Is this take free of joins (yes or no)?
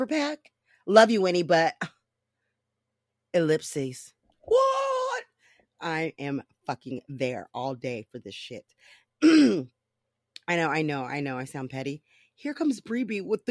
yes